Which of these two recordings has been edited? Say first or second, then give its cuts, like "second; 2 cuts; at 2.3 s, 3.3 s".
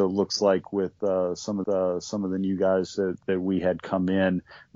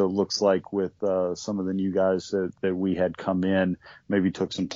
first; 1 cut; at 1.6 s